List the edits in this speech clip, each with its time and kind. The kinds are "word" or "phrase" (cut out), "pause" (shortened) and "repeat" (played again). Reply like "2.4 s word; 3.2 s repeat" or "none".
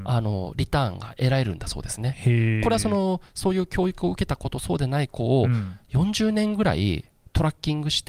none